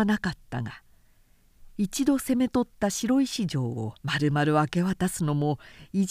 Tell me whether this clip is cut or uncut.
cut